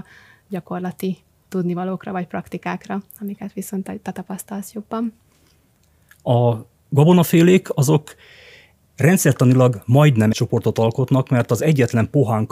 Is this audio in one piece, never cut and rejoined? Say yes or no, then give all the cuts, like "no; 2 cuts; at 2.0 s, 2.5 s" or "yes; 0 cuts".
no; 1 cut; at 10.3 s